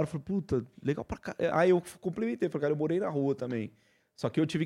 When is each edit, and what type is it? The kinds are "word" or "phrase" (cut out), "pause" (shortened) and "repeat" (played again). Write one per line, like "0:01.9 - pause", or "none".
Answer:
none